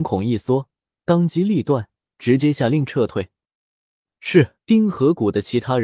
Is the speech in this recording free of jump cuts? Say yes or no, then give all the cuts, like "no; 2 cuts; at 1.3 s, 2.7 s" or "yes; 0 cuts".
no; 2 cuts; at 2.0 s, 4.6 s